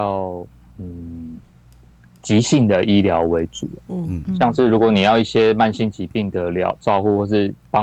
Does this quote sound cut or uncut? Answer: uncut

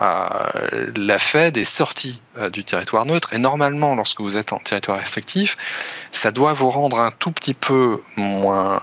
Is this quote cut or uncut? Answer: uncut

